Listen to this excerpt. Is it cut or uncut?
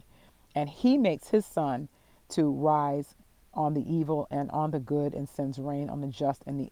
uncut